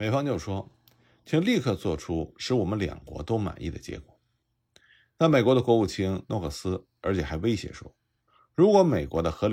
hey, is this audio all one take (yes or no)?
yes